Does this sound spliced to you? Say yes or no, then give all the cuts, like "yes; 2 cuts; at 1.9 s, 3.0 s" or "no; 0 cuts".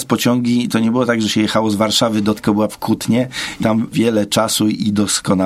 yes; 4 cuts; at 2.4 s, 2.7 s, 3.6 s, 3.9 s